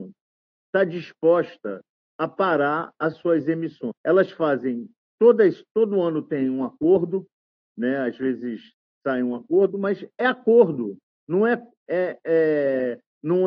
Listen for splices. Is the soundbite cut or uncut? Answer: cut